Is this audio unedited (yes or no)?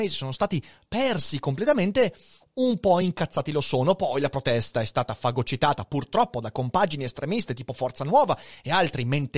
yes